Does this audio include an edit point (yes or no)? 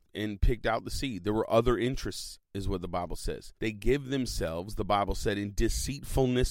yes